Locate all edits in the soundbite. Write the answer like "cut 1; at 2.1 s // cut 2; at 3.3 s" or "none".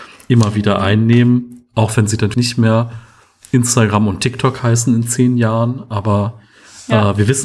cut 1; at 2.3 s